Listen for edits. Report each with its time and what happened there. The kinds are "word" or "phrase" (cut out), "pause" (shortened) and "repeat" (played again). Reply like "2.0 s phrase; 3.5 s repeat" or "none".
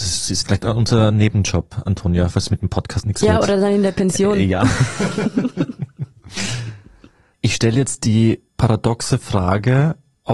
8.5 s pause